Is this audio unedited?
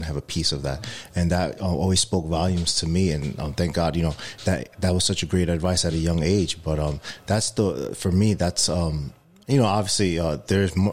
yes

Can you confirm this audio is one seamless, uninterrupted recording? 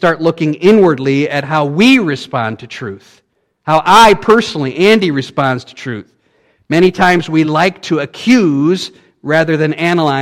yes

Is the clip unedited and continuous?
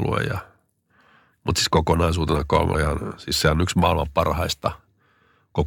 no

